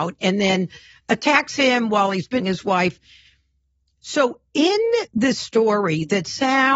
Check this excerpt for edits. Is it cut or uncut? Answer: cut